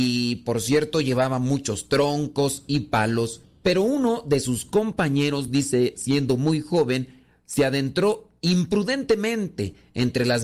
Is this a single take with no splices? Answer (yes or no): yes